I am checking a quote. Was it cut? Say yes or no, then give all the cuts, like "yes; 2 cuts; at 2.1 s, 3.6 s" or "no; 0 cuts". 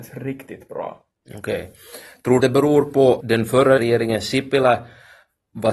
yes; 3 cuts; at 2.4 s, 3.2 s, 3.8 s